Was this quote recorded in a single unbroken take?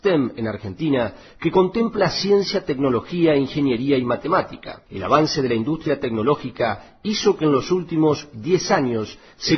yes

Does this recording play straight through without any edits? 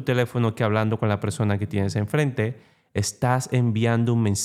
yes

